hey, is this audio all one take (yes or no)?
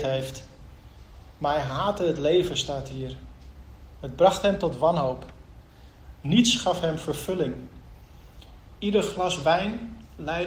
yes